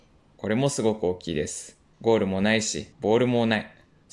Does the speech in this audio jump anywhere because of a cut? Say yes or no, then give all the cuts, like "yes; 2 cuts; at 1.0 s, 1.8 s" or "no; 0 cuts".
yes; 2 cuts; at 1.9 s, 2.9 s